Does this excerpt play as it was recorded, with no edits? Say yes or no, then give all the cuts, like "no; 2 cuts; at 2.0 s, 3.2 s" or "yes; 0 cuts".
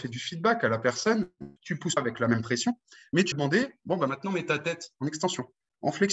no; 3 cuts; at 1.6 s, 2.0 s, 3.3 s